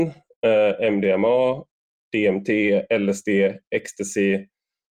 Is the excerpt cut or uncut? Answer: uncut